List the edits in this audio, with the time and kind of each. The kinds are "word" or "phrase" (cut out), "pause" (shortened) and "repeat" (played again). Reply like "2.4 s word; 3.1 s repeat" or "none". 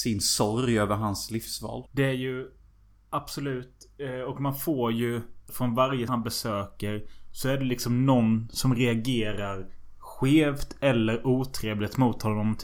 1.9 s pause; 2.7 s pause; 5.5 s word; 6.1 s word